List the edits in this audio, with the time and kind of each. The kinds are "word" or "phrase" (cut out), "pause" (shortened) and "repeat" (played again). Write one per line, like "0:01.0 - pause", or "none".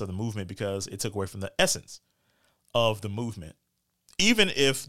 none